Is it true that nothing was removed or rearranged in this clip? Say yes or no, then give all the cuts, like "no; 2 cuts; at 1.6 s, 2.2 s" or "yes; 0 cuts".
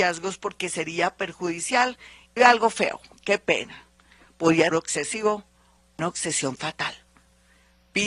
no; 3 cuts; at 2.4 s, 4.7 s, 6.0 s